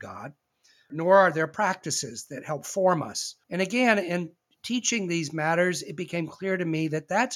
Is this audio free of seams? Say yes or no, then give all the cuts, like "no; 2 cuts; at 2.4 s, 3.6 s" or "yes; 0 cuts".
no; 1 cut; at 3.4 s